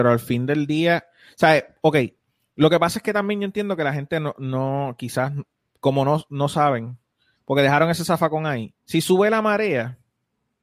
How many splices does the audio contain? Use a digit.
1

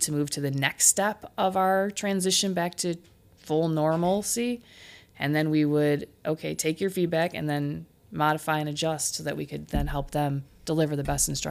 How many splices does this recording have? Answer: 0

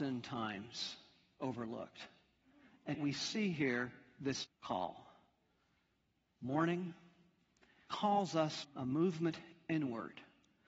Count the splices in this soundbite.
4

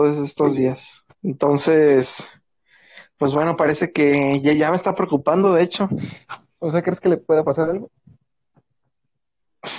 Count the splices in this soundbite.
1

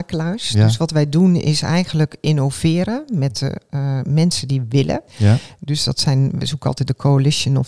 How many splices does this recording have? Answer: 1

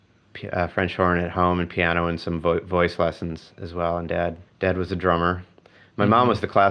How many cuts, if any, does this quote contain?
1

